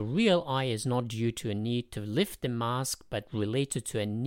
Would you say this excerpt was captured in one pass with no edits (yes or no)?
yes